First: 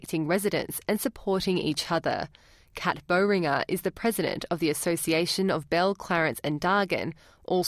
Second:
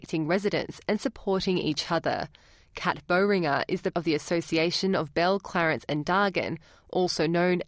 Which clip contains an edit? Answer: second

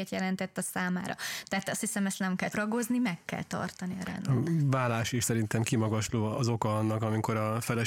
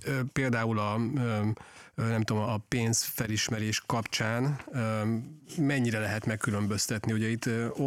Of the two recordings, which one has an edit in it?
first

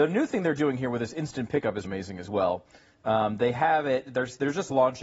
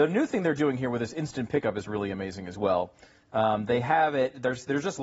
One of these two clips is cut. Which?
first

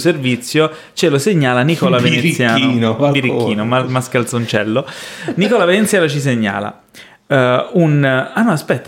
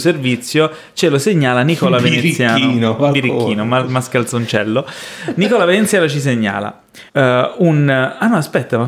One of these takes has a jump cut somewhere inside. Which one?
second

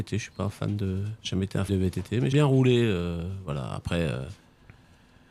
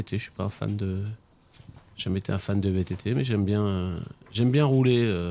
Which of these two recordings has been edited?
first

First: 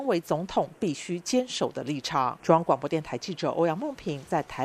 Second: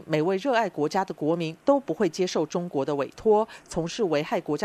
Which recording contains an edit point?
first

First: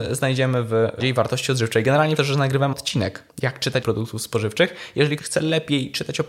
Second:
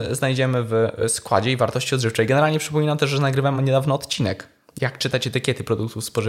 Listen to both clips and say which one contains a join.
first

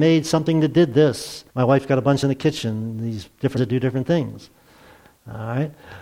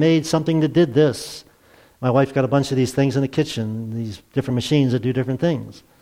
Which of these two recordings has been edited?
first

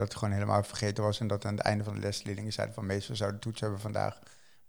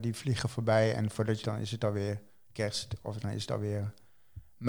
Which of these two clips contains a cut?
second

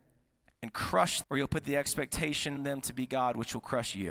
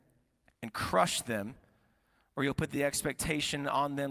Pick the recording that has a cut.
first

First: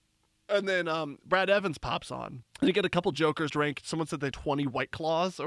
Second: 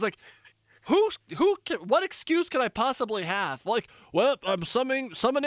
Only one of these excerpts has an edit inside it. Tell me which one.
first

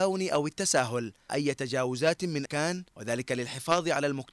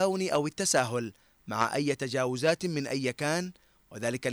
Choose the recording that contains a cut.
first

